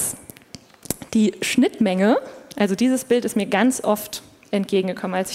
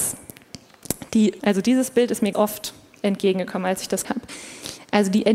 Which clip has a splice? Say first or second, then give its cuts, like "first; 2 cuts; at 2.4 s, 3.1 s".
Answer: second; 3 cuts; at 1.4 s, 2.3 s, 4.0 s